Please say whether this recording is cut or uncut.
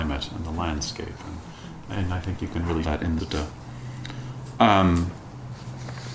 cut